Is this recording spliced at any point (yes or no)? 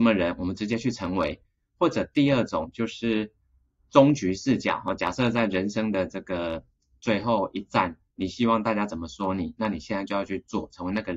no